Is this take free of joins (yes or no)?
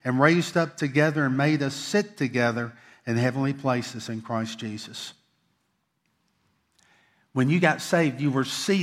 yes